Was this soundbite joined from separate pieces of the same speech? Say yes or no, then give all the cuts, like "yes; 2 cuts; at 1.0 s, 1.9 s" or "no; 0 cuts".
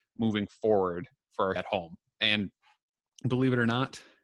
yes; 1 cut; at 1.6 s